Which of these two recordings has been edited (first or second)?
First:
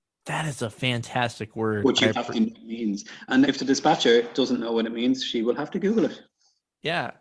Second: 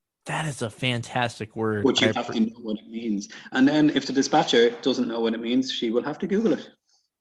first